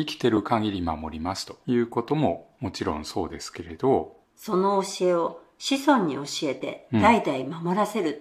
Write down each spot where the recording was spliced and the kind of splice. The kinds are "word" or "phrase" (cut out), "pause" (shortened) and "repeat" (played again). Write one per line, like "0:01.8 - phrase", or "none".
0:04.2 - pause